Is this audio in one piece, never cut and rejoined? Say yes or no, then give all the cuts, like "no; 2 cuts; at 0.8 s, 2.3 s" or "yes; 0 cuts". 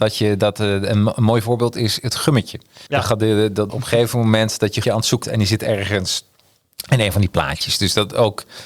no; 4 cuts; at 2.9 s, 3.7 s, 4.8 s, 5.2 s